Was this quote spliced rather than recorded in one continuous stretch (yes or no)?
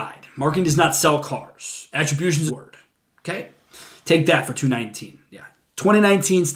yes